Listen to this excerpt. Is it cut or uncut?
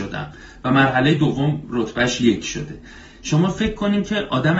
uncut